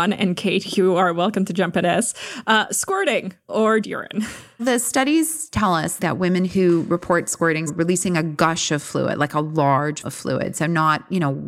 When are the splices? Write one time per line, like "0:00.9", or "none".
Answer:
0:01.8
0:03.5
0:03.8
0:04.6
0:07.7
0:10.0

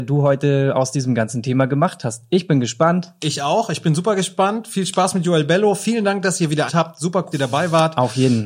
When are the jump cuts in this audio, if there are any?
0:06.7
0:07.3

